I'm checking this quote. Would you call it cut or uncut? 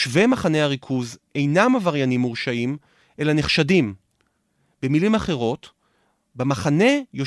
uncut